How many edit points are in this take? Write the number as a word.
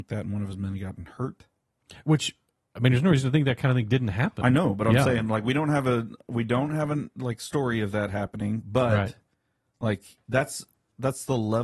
zero